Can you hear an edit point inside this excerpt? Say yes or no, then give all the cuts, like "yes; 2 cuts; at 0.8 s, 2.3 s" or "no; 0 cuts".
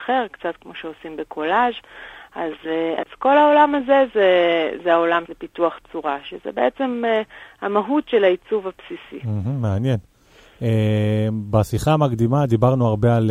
yes; 1 cut; at 5.2 s